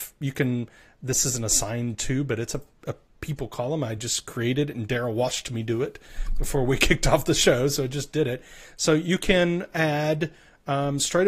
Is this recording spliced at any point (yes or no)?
no